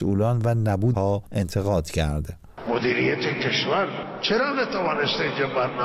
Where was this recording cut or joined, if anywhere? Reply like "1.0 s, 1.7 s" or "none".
0.9 s